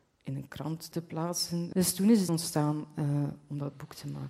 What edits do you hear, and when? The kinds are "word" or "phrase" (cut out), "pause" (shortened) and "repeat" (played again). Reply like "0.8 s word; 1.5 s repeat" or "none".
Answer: 2.3 s word